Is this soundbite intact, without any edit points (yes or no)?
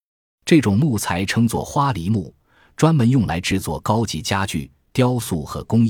yes